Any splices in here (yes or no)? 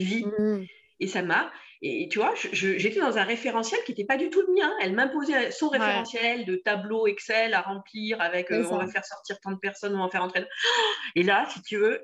no